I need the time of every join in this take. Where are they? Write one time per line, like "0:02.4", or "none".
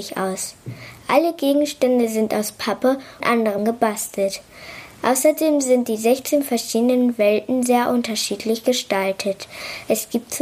0:03.2
0:03.6